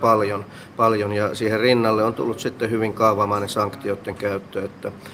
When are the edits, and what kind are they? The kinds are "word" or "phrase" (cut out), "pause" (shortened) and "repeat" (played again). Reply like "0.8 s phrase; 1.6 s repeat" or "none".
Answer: none